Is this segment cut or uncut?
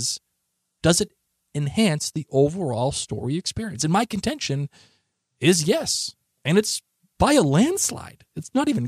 uncut